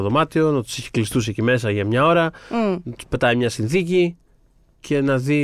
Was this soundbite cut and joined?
no; 0 cuts

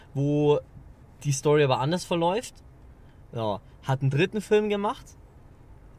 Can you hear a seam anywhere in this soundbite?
no; 0 cuts

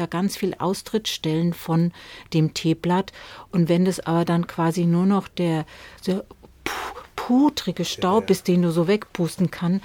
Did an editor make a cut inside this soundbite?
yes; 1 cut; at 6.0 s

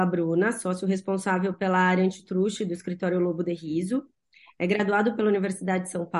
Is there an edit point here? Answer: no; 0 cuts

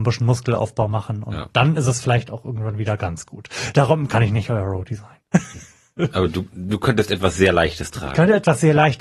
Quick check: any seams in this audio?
no; 0 cuts

